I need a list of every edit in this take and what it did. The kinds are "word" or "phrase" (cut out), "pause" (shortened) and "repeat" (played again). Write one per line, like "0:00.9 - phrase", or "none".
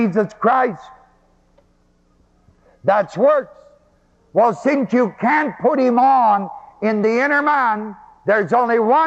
none